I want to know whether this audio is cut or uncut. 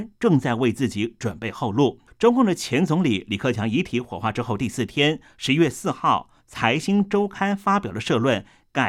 cut